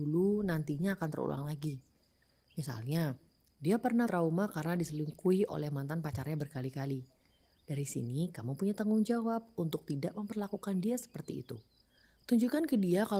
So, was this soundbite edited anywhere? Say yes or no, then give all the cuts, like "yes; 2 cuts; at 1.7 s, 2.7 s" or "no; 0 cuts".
yes; 1 cut; at 4.1 s